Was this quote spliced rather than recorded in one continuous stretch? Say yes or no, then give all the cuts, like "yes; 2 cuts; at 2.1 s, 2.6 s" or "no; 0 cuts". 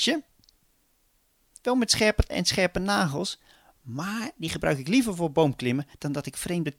yes; 1 cut; at 2.3 s